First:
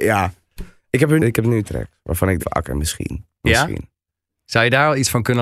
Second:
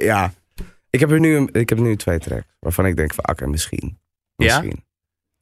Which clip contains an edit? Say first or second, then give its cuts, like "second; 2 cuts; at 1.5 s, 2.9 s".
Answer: first; 4 cuts; at 1.2 s, 1.6 s, 2.4 s, 3.3 s